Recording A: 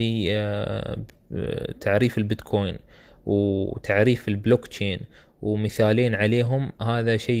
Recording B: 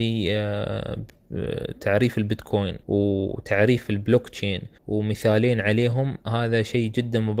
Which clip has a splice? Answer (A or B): B